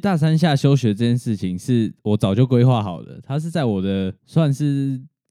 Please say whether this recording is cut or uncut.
cut